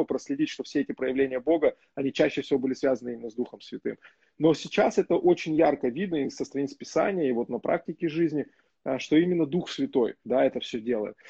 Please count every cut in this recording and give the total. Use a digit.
0